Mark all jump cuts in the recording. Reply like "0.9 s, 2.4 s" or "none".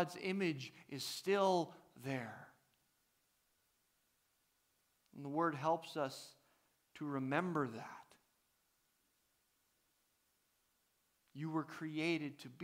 none

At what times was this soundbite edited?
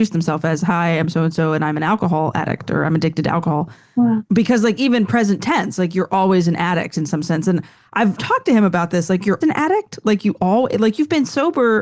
8.2 s, 9.4 s

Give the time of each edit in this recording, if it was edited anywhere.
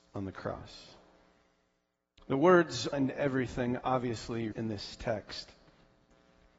2.9 s, 4.5 s

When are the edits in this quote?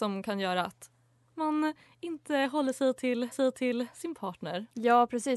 3.3 s

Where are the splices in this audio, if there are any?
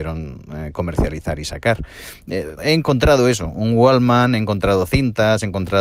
2.6 s

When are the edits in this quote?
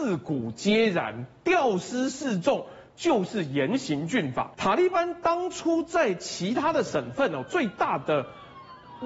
4.5 s

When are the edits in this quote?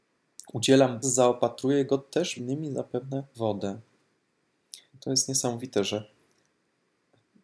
1.0 s, 2.4 s, 3.3 s, 4.9 s

